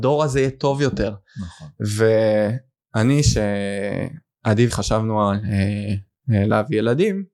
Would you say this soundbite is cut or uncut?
cut